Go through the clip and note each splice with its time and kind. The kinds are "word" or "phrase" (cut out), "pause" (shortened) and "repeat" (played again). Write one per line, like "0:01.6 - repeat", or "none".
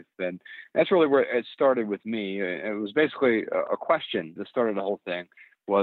0:04.4 - word